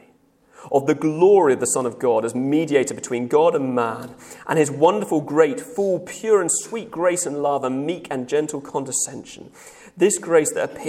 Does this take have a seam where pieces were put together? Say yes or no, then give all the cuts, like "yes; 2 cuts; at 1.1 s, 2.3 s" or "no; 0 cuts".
no; 0 cuts